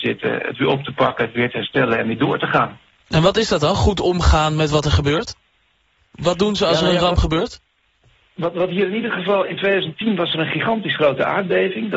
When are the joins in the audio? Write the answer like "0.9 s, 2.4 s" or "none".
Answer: none